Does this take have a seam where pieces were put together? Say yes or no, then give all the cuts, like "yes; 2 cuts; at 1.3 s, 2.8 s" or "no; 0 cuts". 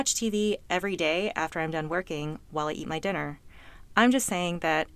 no; 0 cuts